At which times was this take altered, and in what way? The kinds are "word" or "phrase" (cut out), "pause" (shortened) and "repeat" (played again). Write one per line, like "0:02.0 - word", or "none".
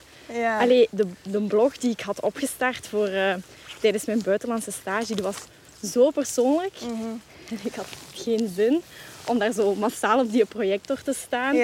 0:08.1 - word